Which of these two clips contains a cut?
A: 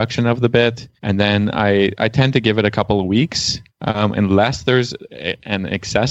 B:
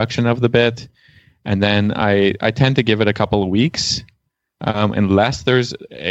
A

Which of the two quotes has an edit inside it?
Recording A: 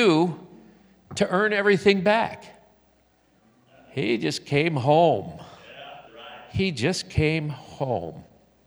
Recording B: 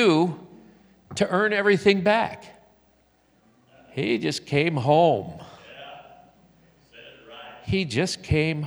A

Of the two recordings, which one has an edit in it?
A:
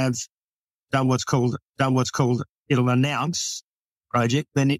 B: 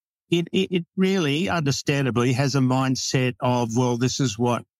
A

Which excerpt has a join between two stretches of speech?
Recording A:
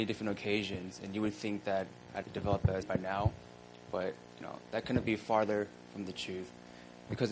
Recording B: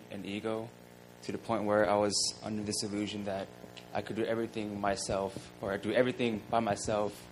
A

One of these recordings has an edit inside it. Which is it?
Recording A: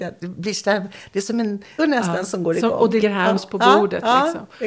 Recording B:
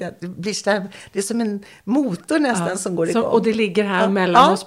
A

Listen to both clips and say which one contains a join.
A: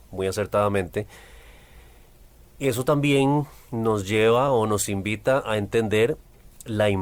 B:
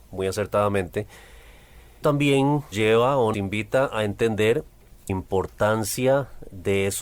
B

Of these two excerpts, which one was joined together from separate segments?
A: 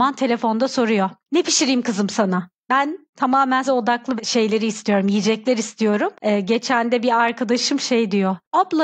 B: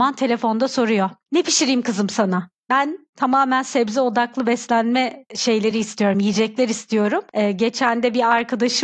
A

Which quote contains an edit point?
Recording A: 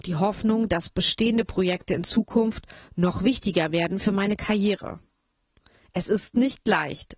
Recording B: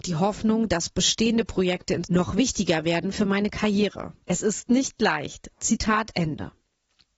B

